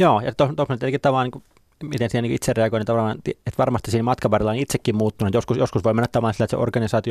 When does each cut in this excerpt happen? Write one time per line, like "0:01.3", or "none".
none